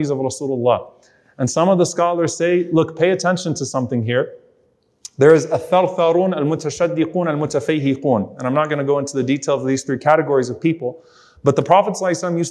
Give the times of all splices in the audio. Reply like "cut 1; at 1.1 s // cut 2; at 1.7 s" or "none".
none